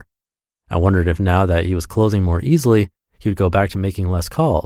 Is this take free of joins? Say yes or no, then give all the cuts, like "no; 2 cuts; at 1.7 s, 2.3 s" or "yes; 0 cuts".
yes; 0 cuts